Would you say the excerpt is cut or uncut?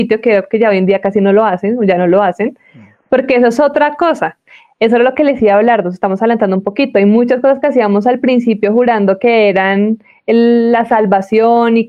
uncut